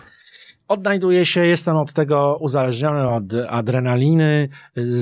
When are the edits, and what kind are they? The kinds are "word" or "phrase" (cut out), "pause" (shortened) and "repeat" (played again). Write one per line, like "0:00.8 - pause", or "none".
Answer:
none